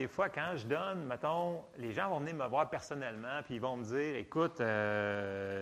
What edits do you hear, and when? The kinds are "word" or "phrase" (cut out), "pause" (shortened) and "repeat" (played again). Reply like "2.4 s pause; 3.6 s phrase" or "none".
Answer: none